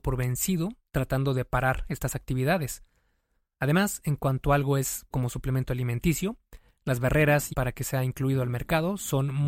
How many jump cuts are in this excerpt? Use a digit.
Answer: 2